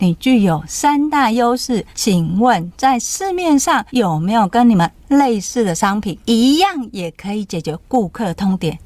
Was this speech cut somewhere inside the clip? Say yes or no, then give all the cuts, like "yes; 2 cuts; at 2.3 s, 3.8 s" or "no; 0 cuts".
yes; 3 cuts; at 1.9 s, 3.9 s, 6.2 s